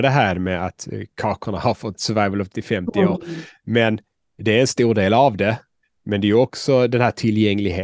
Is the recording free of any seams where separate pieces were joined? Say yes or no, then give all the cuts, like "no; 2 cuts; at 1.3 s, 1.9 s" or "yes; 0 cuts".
no; 2 cuts; at 1.9 s, 2.5 s